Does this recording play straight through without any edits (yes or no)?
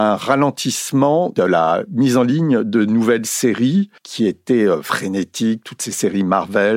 no